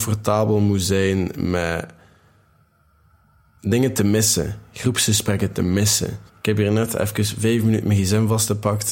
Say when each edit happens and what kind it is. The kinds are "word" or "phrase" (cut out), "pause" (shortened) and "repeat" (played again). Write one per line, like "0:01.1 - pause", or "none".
0:06.3 - pause